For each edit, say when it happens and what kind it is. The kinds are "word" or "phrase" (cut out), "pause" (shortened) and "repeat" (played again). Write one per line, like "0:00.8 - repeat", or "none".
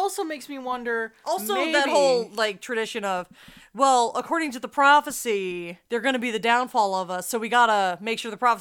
0:05.8 - pause